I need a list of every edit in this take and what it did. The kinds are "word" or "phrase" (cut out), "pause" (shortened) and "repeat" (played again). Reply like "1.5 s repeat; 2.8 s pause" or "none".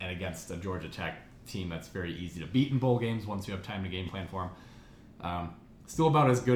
none